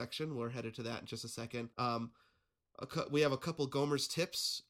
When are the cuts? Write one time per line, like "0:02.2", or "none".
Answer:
0:01.7